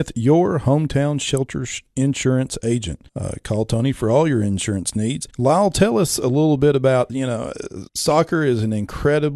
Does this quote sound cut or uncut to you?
cut